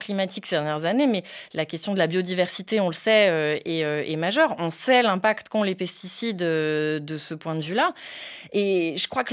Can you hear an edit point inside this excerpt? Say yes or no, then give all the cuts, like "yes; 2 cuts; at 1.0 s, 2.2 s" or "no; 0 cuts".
no; 0 cuts